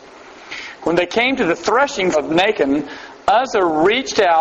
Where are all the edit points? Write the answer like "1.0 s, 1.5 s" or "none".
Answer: 2.1 s

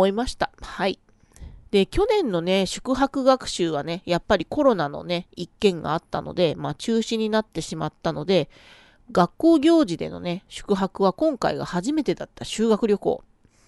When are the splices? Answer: 1.6 s

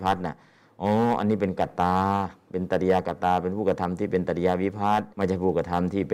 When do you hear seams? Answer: 5.1 s

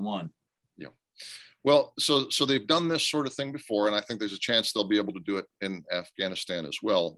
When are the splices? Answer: none

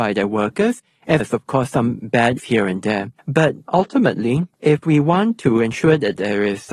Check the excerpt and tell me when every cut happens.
1.2 s, 2.4 s, 3.2 s, 4.5 s

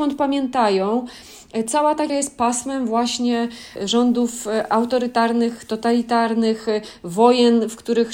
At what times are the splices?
2.1 s, 3.8 s

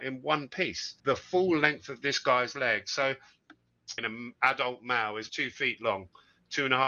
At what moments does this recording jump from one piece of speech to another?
1.0 s, 4.0 s, 5.3 s

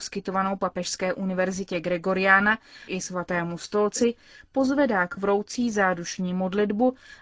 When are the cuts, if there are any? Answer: 2.9 s, 5.2 s

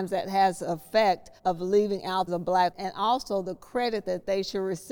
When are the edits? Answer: 1.4 s, 2.3 s, 2.7 s

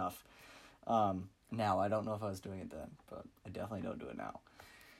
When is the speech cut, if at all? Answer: 1.4 s, 3.4 s

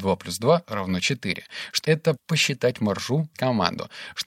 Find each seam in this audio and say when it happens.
1.8 s, 2.2 s, 3.3 s

